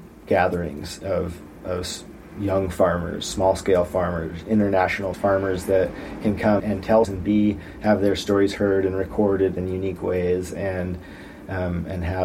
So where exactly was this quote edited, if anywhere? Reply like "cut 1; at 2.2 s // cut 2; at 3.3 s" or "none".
cut 1; at 1.0 s // cut 2; at 5.1 s // cut 3; at 6.6 s // cut 4; at 7.0 s

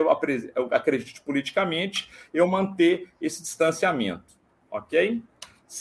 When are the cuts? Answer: none

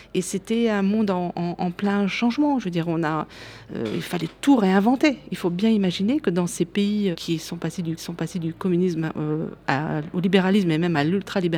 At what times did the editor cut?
cut 1; at 7.1 s // cut 2; at 8.0 s

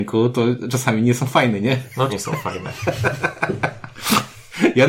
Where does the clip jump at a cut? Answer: cut 1; at 2.1 s

